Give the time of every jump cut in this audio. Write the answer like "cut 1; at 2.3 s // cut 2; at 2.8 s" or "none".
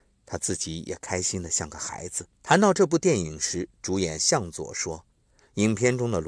cut 1; at 2.3 s // cut 2; at 5.1 s

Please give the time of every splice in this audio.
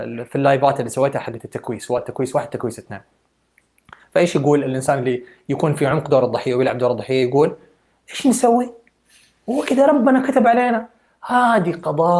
none

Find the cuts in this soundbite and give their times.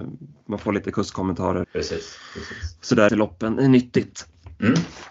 cut 1; at 1.6 s // cut 2; at 3.1 s

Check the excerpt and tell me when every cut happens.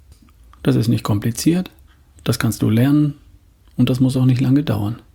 none

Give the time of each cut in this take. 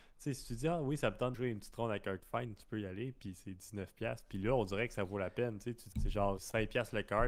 cut 1; at 1.3 s // cut 2; at 2.2 s // cut 3; at 5.9 s // cut 4; at 6.4 s

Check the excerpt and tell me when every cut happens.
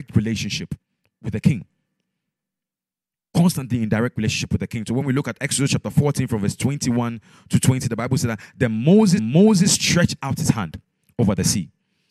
cut 1; at 9.2 s

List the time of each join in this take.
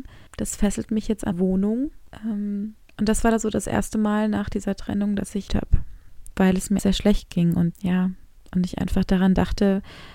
cut 1; at 1.3 s // cut 2; at 5.5 s // cut 3; at 6.8 s // cut 4; at 7.7 s

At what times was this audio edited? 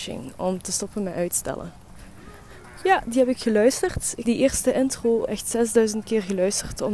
cut 1; at 4.3 s // cut 2; at 5.3 s

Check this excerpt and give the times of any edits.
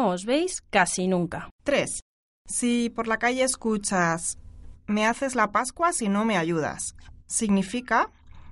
cut 1; at 1.5 s

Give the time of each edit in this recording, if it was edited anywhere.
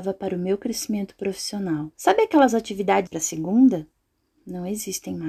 cut 1; at 2.0 s // cut 2; at 3.1 s

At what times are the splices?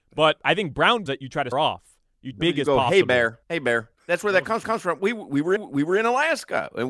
cut 1; at 1.1 s // cut 2; at 1.5 s // cut 3; at 2.3 s // cut 4; at 3.4 s // cut 5; at 4.0 s // cut 6; at 4.6 s // cut 7; at 5.6 s

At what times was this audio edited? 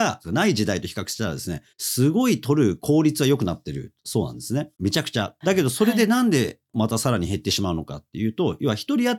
cut 1; at 1.7 s // cut 2; at 4.7 s

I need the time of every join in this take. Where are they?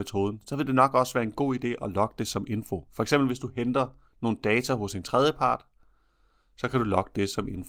none

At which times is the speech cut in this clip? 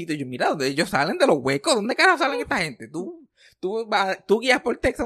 none

